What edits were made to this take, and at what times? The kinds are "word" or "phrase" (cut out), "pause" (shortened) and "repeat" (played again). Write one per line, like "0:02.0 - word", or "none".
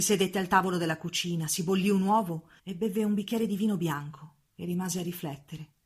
0:02.6 - pause
0:04.5 - pause